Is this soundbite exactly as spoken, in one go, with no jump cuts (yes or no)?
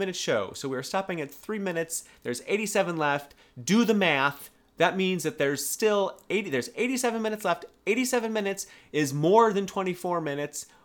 yes